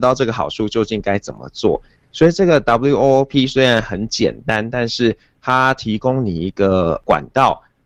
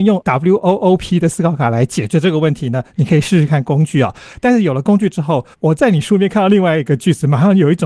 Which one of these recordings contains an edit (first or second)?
second